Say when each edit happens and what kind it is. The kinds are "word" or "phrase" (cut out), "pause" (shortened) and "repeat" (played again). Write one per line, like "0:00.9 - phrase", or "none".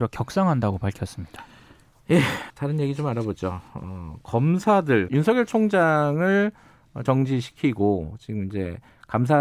0:02.5 - word
0:05.1 - phrase
0:07.1 - word